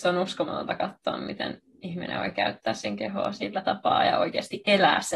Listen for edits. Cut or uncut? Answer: uncut